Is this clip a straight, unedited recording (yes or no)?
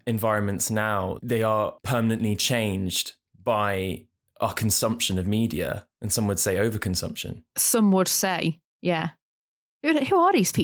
yes